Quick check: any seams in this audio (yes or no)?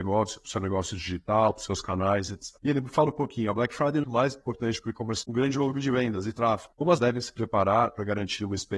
yes